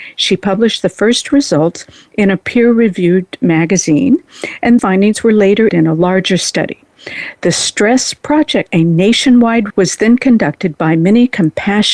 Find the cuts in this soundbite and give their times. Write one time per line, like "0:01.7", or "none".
0:01.3
0:04.8
0:05.7
0:08.7
0:09.7